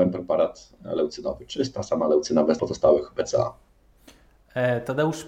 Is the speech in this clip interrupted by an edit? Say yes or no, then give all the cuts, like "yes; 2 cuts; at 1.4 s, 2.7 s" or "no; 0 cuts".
yes; 1 cut; at 2.6 s